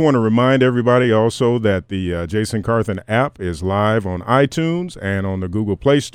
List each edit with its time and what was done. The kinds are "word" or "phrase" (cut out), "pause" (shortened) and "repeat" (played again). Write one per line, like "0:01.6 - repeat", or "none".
none